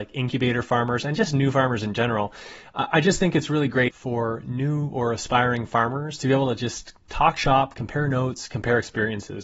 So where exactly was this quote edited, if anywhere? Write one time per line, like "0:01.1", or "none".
none